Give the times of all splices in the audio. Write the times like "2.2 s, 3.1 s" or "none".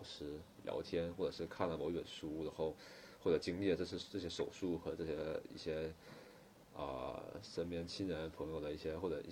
none